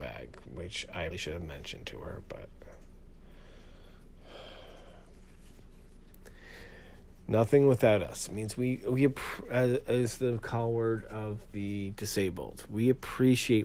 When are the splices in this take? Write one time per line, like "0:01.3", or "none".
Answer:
0:01.1